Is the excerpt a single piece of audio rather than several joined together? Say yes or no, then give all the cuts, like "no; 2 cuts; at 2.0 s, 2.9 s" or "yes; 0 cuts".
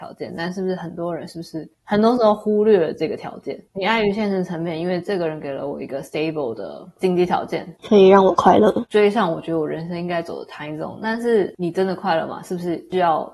no; 2 cuts; at 1.7 s, 3.7 s